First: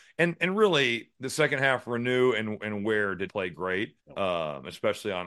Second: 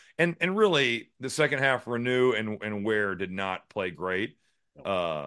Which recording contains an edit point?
first; 2 cuts; at 3.3 s, 4.0 s

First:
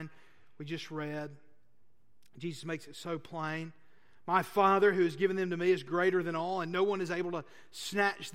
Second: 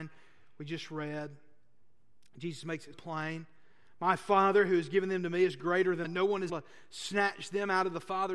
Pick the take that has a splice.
second; 3 cuts; at 2.9 s, 6.0 s, 6.5 s

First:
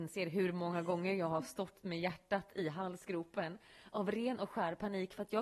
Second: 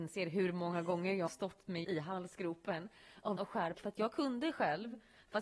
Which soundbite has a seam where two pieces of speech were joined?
second; 4 cuts; at 1.3 s, 1.8 s, 3.4 s, 3.7 s

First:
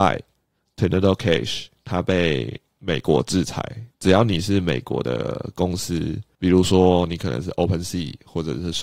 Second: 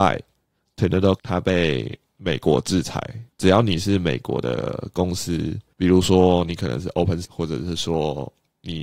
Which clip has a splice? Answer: second; 2 cuts; at 1.2 s, 7.2 s

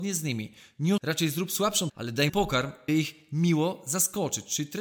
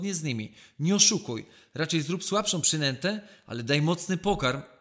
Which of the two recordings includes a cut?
first; 4 cuts; at 1.0 s, 1.9 s, 2.3 s, 2.9 s

